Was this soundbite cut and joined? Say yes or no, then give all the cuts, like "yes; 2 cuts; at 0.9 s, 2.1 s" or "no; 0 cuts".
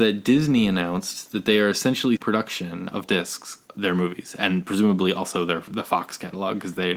yes; 3 cuts; at 2.2 s, 3.0 s, 3.7 s